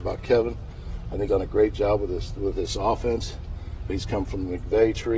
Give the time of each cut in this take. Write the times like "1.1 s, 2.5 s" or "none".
1.3 s, 3.9 s